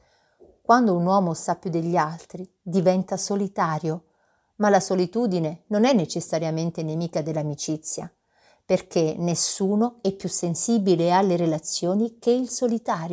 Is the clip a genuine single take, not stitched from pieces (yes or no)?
yes